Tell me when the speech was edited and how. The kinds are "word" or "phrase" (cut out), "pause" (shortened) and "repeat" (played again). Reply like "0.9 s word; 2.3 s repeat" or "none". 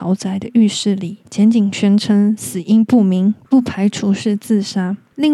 1.2 s pause